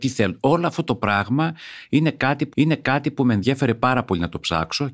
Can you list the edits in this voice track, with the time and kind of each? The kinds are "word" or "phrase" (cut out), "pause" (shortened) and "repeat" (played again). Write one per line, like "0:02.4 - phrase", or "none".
0:02.5 - repeat